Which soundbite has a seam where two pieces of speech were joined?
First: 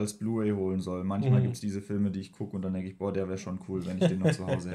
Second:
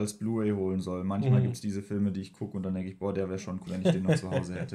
second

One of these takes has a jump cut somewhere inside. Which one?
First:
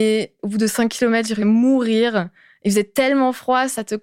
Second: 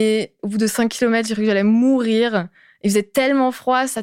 first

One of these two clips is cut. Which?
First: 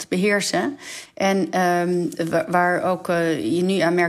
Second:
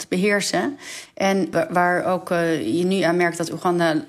second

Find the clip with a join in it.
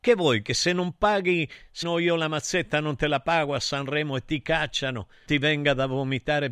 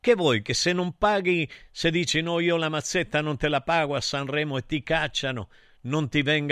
first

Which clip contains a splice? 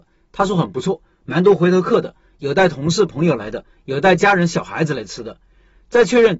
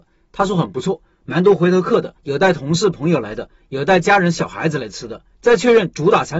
second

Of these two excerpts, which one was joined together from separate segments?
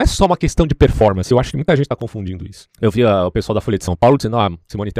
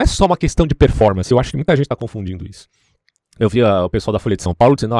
first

